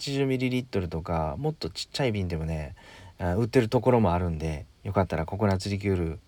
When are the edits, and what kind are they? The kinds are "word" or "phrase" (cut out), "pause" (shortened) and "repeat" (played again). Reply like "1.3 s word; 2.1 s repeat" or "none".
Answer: 4.8 s pause